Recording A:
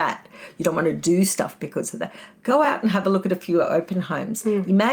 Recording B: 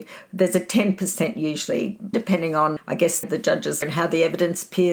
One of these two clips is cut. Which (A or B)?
B